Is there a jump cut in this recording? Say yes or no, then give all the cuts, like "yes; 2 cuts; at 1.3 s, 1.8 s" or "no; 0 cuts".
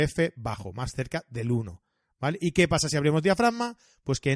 no; 0 cuts